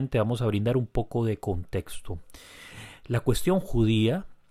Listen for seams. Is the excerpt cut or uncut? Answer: uncut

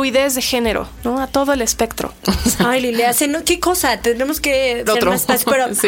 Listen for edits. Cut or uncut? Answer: cut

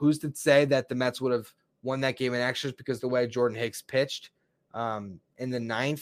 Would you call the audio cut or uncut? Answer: uncut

